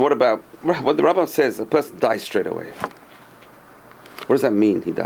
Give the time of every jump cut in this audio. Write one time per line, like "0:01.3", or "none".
none